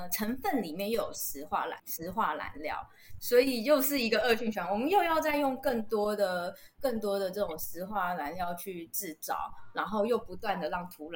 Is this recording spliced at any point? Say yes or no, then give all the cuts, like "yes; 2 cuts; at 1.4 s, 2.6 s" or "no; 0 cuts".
yes; 1 cut; at 1.8 s